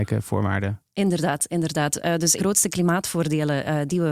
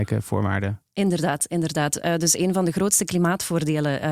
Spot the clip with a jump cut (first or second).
first